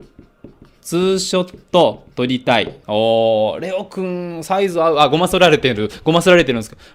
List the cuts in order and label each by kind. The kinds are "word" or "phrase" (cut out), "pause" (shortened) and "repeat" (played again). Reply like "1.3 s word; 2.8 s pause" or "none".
2.8 s pause